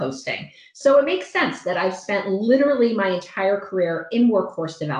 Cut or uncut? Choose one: uncut